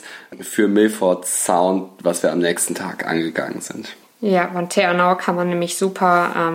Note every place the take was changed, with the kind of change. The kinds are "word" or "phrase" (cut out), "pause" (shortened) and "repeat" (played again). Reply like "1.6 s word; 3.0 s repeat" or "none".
none